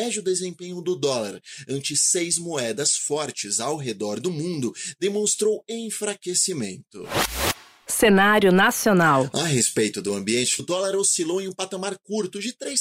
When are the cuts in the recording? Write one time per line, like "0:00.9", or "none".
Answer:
0:10.6